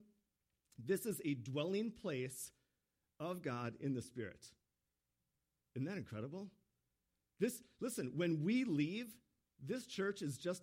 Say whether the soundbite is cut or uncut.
uncut